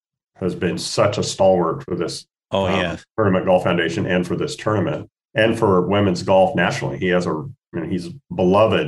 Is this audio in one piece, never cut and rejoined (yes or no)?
yes